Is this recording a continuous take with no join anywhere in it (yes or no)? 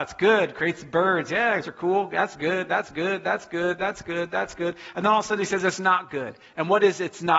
no